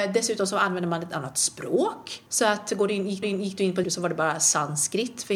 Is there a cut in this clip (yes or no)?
yes